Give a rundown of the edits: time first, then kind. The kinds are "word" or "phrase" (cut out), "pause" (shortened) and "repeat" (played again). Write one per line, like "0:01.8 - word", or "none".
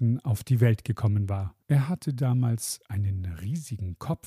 0:01.6 - pause